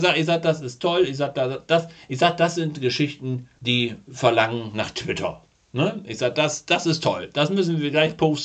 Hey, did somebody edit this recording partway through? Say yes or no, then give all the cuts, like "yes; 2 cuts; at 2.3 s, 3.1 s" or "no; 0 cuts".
no; 0 cuts